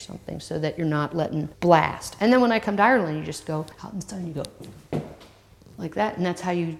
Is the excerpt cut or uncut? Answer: cut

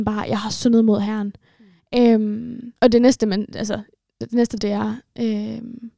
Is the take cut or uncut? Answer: cut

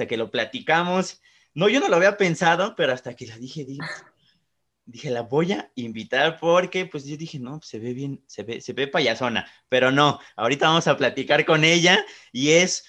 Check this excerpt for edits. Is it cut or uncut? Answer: uncut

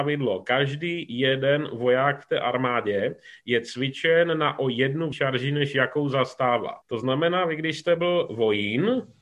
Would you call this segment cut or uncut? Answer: cut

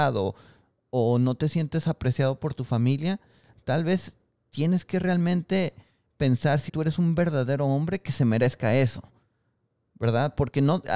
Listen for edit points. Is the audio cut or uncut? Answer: cut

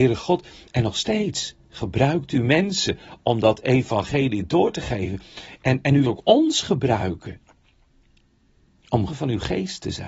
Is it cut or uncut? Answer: cut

